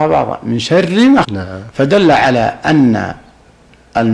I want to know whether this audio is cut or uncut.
cut